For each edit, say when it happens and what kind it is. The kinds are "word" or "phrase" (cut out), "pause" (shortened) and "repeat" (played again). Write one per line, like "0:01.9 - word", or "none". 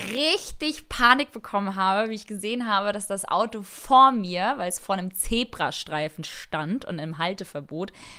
none